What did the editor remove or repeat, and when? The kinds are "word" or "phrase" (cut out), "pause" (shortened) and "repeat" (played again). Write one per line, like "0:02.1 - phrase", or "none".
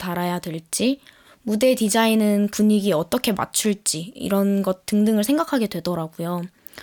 0:02.5 - word